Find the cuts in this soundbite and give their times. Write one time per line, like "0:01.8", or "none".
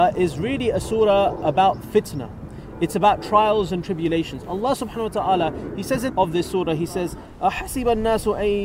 0:06.1